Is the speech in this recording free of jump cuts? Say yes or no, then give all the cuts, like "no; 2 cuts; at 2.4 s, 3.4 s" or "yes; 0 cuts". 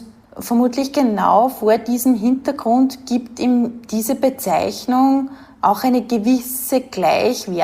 yes; 0 cuts